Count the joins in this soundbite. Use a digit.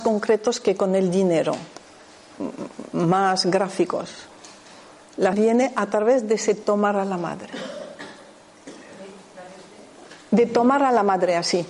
1